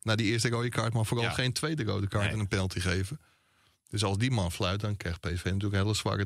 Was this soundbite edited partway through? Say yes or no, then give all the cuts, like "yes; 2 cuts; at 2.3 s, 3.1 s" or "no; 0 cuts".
no; 0 cuts